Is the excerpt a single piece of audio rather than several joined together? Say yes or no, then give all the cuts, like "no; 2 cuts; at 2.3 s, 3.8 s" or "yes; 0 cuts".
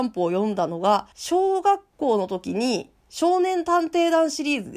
no; 2 cuts; at 1.1 s, 3.0 s